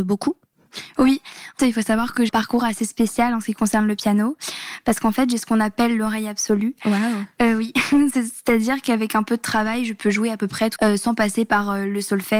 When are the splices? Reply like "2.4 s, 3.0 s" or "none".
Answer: 1.6 s, 2.3 s, 10.8 s